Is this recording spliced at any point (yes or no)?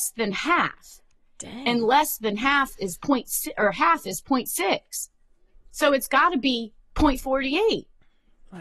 no